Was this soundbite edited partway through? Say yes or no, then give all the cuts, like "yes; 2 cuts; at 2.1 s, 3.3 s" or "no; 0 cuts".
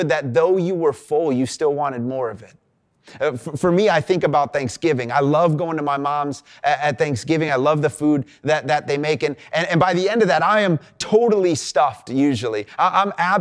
no; 0 cuts